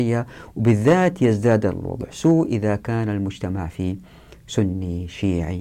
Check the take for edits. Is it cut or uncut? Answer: uncut